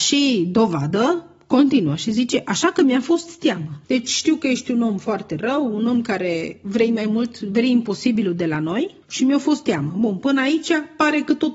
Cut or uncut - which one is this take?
cut